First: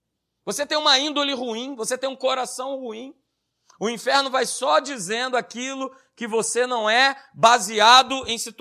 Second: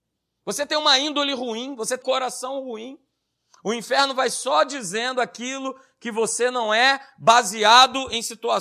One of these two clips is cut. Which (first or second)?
second